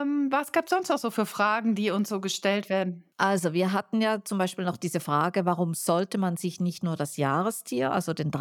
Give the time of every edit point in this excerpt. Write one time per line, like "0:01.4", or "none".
0:03.1